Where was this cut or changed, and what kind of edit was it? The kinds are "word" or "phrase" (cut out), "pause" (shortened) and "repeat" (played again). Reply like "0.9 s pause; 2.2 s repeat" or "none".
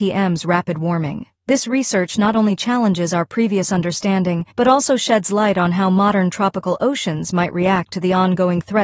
1.4 s pause; 4.5 s pause